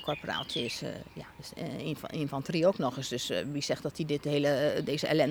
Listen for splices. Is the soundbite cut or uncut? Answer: uncut